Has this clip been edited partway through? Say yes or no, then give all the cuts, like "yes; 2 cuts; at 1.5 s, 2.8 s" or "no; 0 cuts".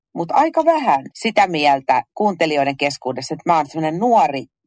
yes; 1 cut; at 1.1 s